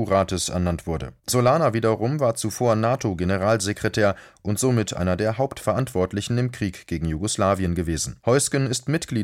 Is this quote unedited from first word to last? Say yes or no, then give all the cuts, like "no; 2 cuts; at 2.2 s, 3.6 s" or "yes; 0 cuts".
no; 2 cuts; at 1.2 s, 8.2 s